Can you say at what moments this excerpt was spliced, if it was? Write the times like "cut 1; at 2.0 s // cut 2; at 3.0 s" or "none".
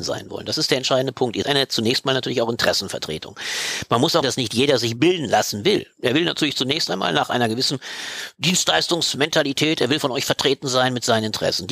cut 1; at 1.4 s // cut 2; at 4.2 s